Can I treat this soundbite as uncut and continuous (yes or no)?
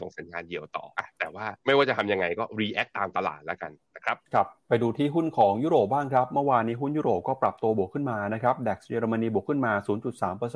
no